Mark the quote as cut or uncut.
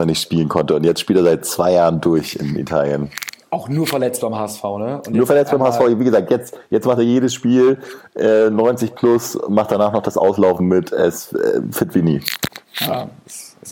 cut